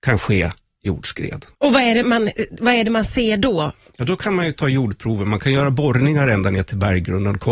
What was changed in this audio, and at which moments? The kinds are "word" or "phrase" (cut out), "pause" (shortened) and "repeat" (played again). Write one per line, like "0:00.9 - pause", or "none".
0:01.5 - pause
0:02.0 - word